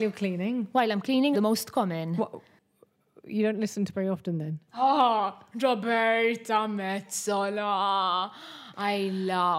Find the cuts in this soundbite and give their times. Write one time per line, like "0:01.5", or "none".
0:01.3
0:03.9
0:04.7